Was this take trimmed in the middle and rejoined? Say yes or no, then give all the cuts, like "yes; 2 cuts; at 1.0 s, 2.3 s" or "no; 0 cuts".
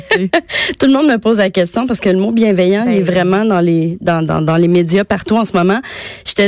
no; 0 cuts